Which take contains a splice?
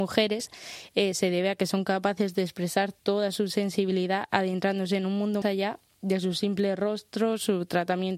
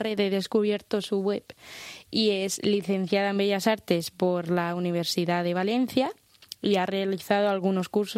first; 1 cut; at 5.4 s

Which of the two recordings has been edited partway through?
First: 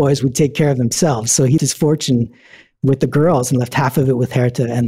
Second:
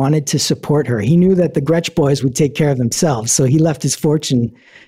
first; 1 cut; at 1.6 s

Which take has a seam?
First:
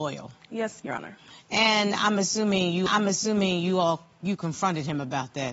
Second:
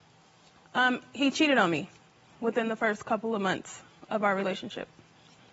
first; 1 cut; at 2.9 s

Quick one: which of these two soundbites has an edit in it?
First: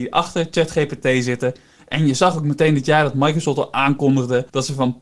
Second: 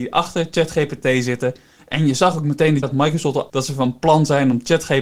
second; 2 cuts; at 2.8 s, 3.5 s

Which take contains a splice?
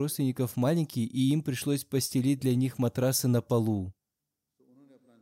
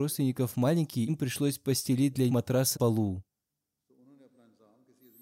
second; 3 cuts; at 1.1 s, 2.3 s, 2.7 s

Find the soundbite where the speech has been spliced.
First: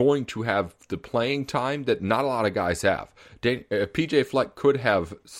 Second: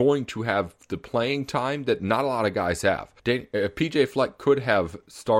second; 1 cut; at 3.2 s

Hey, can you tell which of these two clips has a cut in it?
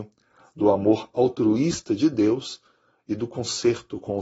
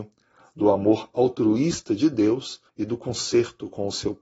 second; 1 cut; at 2.7 s

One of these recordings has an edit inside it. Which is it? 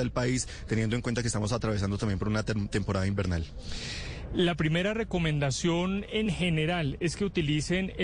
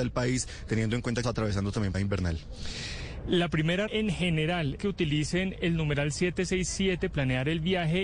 second; 5 cuts; at 1.2 s, 1.9 s, 3.9 s, 4.8 s, 7.1 s

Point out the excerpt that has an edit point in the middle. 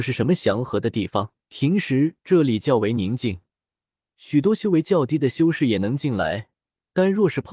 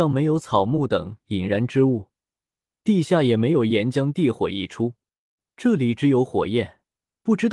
first; 1 cut; at 1.4 s

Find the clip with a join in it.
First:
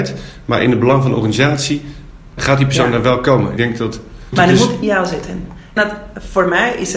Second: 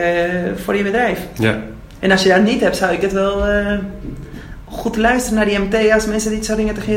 first; 5 cuts; at 2.4 s, 3.6 s, 4.3 s, 4.8 s, 5.8 s

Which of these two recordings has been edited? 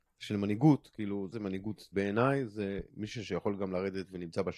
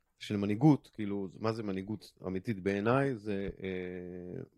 first; 3 cuts; at 1.3 s, 1.9 s, 2.9 s

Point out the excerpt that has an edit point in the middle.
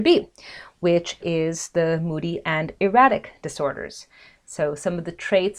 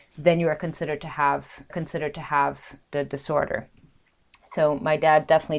second; 1 cut; at 1.7 s

